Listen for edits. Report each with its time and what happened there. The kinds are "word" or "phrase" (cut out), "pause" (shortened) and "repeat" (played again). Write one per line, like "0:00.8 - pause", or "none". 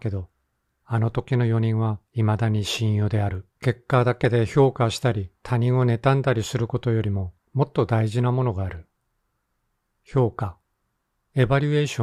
0:02.1 - pause
0:03.5 - pause
0:05.4 - pause
0:07.4 - pause